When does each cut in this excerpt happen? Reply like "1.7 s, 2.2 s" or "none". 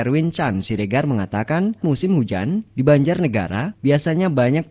1.8 s